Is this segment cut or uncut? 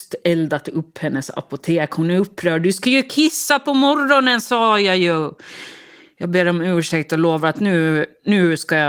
uncut